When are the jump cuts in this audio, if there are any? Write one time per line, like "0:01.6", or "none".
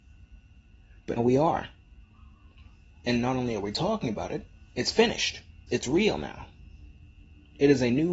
0:01.2
0:05.7